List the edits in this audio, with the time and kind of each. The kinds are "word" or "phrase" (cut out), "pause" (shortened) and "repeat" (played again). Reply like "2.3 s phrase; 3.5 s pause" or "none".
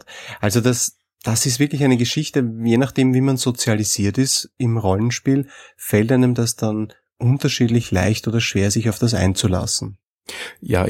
none